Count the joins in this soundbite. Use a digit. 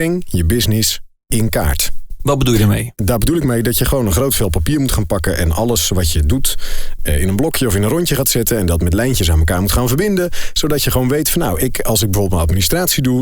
1